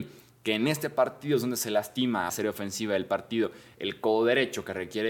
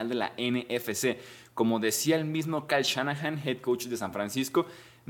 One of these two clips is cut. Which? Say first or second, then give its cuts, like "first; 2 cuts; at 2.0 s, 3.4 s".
first; 1 cut; at 2.3 s